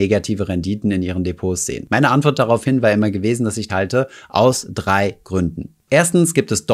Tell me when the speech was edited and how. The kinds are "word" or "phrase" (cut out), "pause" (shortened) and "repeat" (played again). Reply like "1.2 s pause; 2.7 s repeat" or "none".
3.7 s phrase